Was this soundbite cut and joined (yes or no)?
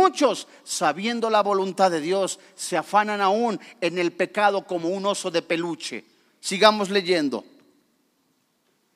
no